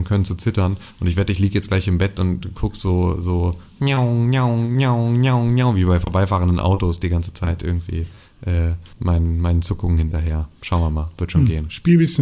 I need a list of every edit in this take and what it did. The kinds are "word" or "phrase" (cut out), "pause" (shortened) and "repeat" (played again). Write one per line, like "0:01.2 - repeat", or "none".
0:08.9 - pause